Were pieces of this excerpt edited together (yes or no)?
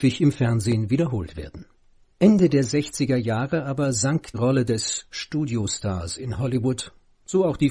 yes